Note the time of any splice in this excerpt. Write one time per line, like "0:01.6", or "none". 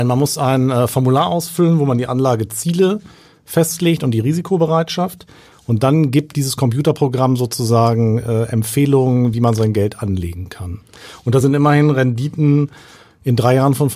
none

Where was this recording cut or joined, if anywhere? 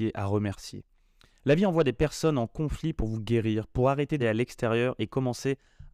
0:04.2

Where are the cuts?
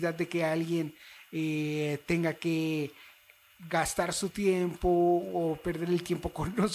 none

